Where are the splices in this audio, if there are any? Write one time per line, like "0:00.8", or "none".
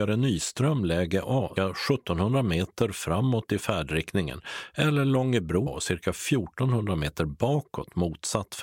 0:01.6
0:05.7

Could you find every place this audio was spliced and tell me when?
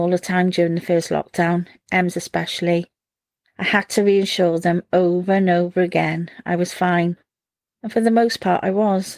none

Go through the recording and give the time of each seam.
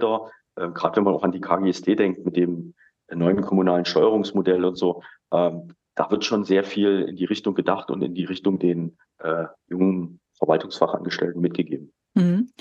0:10.3

